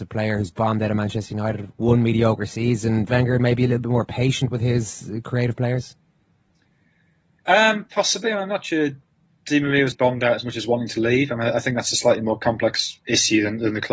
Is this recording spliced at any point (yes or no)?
yes